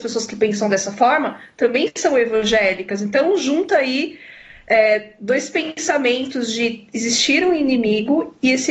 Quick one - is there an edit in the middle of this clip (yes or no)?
no